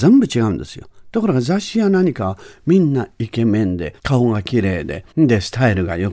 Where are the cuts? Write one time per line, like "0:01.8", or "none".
0:04.0
0:05.1